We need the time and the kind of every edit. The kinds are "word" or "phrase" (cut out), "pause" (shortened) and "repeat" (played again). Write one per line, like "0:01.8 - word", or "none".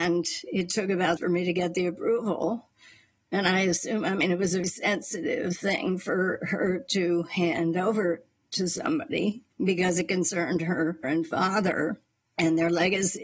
0:01.2 - phrase
0:04.6 - word
0:09.5 - pause
0:11.0 - word